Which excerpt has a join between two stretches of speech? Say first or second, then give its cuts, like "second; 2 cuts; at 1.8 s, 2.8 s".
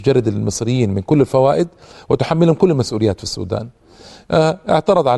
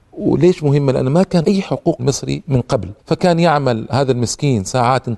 second; 3 cuts; at 1.4 s, 2.0 s, 3.0 s